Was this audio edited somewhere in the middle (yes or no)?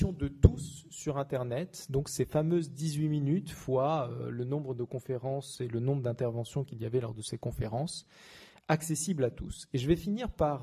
no